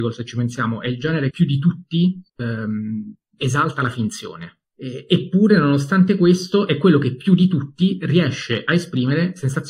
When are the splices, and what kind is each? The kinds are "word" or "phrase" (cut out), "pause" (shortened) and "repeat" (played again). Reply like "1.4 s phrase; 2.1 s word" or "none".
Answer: 1.3 s word; 2.3 s pause; 4.6 s pause